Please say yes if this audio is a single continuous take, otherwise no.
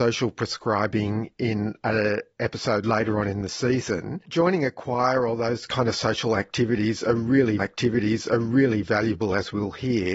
no